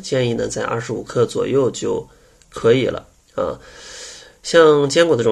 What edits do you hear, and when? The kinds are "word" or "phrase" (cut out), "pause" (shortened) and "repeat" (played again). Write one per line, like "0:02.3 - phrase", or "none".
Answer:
none